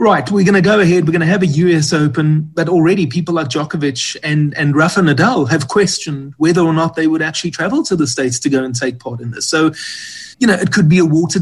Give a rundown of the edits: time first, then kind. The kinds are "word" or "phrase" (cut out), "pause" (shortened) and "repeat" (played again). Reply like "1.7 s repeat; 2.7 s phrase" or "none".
10.3 s pause